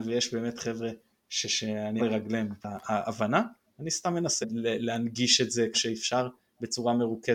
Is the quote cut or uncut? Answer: cut